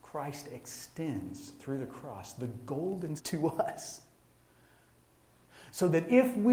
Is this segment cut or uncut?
cut